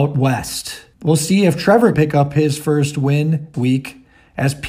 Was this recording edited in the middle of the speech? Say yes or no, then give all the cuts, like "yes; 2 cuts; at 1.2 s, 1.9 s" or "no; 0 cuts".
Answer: yes; 3 cuts; at 0.9 s, 1.9 s, 3.5 s